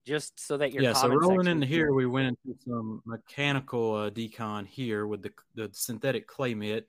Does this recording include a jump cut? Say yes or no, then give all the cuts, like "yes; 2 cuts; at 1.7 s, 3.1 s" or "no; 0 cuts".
no; 0 cuts